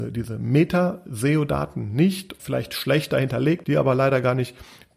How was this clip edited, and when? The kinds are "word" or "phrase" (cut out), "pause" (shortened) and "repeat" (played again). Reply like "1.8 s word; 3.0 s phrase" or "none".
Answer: 2.4 s word; 3.6 s phrase